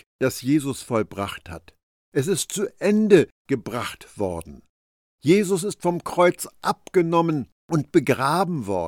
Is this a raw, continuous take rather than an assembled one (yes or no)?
yes